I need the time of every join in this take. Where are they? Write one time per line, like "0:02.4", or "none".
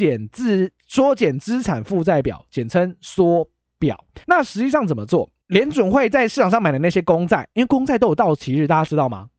0:04.2
0:05.4